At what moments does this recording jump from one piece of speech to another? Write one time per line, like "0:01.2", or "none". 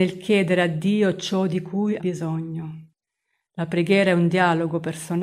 0:02.0